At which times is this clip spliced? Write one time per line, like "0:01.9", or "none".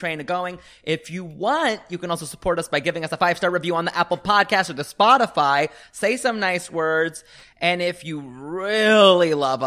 none